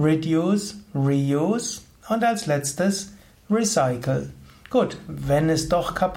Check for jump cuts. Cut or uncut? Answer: uncut